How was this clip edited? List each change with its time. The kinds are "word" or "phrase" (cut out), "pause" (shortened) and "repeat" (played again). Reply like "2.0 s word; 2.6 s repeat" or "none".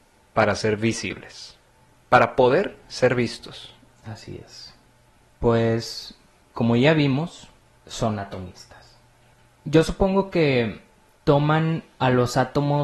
none